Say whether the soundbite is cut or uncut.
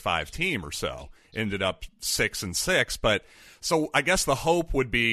uncut